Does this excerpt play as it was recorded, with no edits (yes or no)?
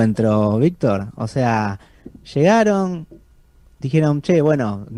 yes